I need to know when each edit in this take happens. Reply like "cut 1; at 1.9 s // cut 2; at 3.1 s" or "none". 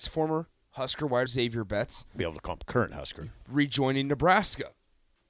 cut 1; at 1.3 s // cut 2; at 2.2 s // cut 3; at 3.3 s